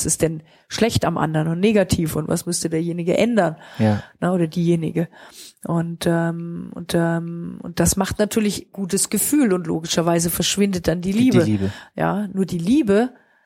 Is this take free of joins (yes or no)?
no